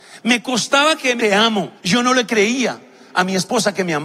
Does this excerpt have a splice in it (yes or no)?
yes